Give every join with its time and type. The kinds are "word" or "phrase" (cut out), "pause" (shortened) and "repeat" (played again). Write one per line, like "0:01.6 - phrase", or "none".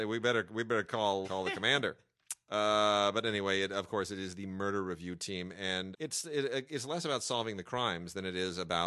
0:01.2 - word
0:05.9 - word